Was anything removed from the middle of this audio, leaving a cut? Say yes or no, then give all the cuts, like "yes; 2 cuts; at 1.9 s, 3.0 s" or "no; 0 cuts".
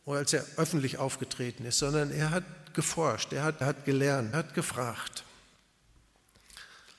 yes; 2 cuts; at 3.6 s, 4.3 s